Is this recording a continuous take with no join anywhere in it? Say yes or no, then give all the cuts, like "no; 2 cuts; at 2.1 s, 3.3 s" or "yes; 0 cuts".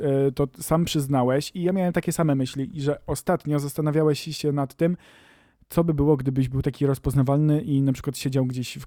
yes; 0 cuts